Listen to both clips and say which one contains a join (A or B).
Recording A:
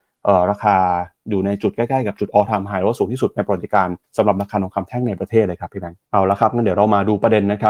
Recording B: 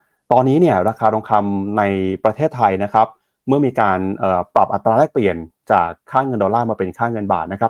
A